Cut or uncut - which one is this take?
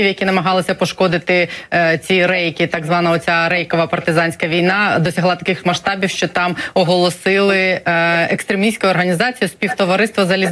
uncut